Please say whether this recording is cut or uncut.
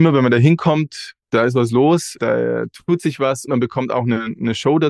cut